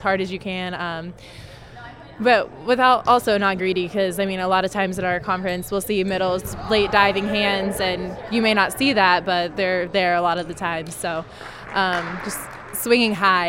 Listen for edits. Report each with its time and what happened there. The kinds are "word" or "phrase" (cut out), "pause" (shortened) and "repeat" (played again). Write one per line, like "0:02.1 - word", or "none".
0:03.6 - word

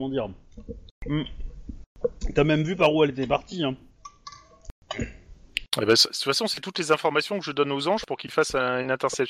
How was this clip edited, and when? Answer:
none

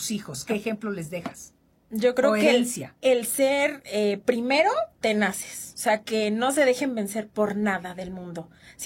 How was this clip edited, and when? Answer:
none

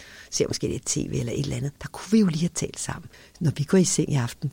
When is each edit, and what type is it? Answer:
0:01.8 - pause
0:03.1 - pause

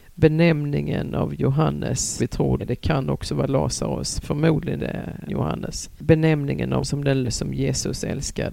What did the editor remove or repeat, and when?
0:02.2 - word
0:02.6 - word
0:04.2 - word
0:04.8 - word
0:05.3 - word
0:06.8 - word
0:07.2 - word

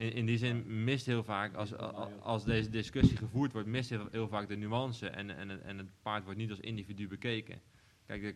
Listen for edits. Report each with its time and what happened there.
none

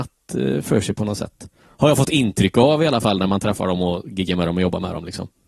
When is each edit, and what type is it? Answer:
none

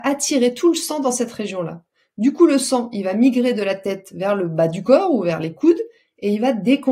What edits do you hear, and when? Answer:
none

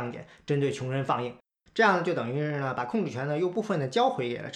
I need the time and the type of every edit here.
0:01.6 - pause

